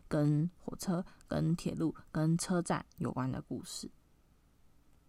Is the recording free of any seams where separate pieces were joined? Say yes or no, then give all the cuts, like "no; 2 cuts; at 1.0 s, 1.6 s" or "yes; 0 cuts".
yes; 0 cuts